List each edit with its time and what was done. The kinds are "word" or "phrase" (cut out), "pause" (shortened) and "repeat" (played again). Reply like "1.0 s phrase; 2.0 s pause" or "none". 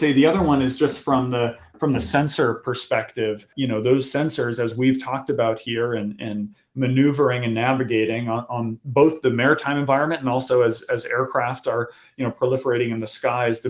none